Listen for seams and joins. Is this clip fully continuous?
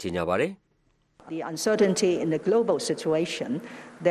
no; 1 cut; at 1.3 s

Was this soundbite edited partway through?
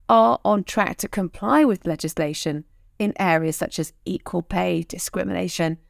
no; 0 cuts

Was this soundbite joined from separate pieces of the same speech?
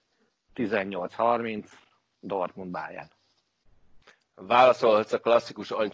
no; 0 cuts

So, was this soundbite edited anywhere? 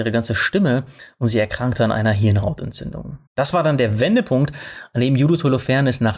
yes; 1 cut; at 3.3 s

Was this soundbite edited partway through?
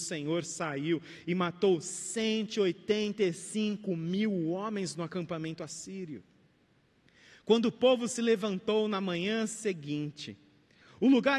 no; 0 cuts

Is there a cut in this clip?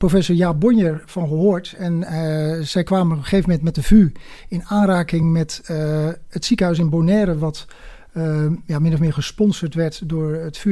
no; 0 cuts

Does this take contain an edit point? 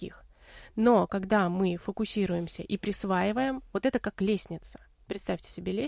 no; 0 cuts

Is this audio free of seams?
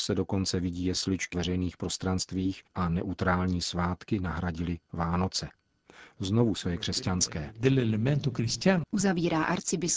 no; 3 cuts; at 1.3 s, 2.7 s, 6.6 s

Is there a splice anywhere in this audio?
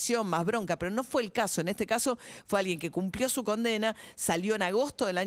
no; 0 cuts

